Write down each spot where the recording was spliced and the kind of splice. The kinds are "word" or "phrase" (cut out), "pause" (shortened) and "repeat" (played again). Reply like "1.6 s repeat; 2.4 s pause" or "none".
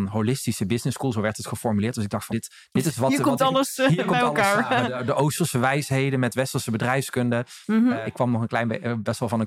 2.3 s word; 8.0 s word